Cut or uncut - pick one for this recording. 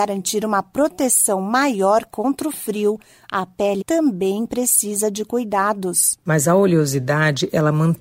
cut